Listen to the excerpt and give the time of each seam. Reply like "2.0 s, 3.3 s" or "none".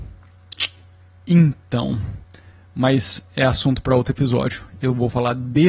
none

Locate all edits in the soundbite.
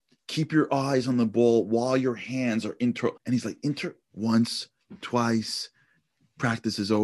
3.2 s, 4.0 s

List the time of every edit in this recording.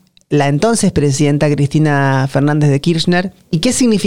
none

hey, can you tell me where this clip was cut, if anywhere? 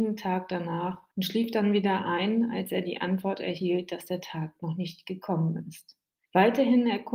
none

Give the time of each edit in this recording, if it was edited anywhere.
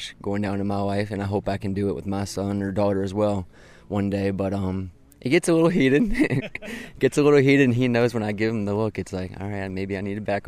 none

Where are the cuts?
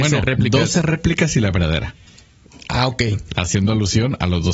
none

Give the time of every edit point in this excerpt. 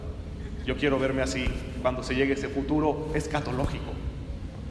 none

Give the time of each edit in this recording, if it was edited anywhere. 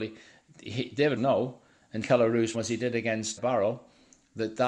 1.2 s, 2.0 s, 2.5 s, 3.4 s

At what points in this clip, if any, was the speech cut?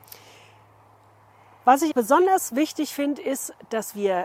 1.9 s

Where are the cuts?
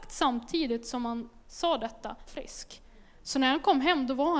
1.4 s, 2.3 s

